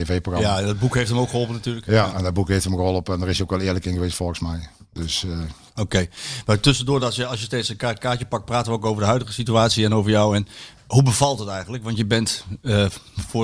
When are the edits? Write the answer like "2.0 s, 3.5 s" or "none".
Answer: none